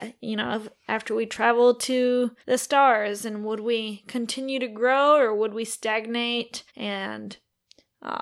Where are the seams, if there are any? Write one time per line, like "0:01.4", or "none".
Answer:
0:02.4
0:06.7